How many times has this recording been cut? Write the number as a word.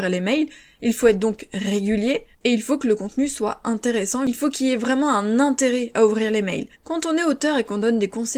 two